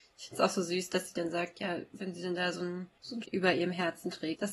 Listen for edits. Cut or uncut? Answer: cut